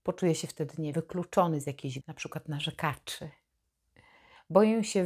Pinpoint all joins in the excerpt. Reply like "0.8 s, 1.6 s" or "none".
0.9 s, 2.0 s